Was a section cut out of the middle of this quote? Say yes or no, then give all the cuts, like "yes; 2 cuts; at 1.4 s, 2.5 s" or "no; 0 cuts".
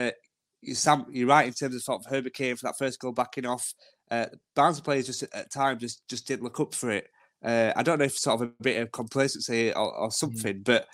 no; 0 cuts